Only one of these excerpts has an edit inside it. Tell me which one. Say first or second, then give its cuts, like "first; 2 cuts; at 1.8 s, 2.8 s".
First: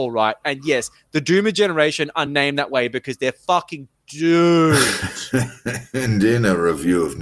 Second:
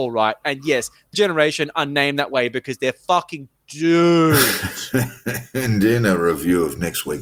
second; 1 cut; at 1.1 s